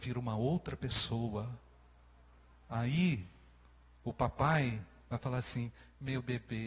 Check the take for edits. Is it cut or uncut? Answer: uncut